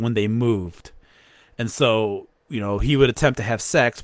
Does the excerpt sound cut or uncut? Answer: uncut